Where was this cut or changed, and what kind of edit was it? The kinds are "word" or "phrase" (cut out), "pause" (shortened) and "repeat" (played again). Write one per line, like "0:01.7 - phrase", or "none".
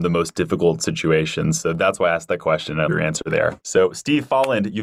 0:02.9 - word
0:03.6 - pause